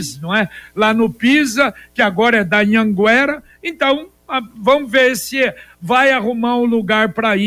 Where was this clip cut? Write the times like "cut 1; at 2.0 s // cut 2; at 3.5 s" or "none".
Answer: none